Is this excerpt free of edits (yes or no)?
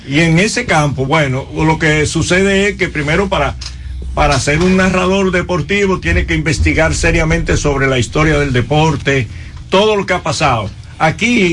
yes